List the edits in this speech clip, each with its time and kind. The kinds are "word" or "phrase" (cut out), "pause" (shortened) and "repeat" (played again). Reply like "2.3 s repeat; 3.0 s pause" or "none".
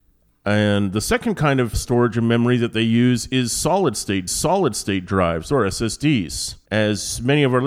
1.7 s word; 4.3 s repeat; 6.7 s pause